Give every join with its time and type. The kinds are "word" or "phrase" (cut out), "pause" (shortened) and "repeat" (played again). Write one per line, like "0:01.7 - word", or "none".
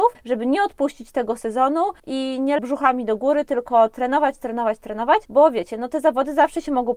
0:02.6 - word